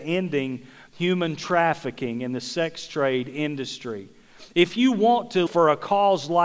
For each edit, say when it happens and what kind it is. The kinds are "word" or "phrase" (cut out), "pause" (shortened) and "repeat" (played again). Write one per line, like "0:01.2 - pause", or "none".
0:05.5 - word